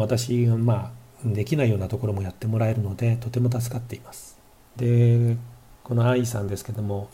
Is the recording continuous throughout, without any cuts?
no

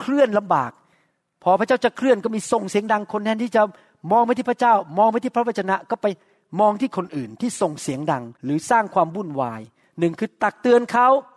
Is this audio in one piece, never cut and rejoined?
no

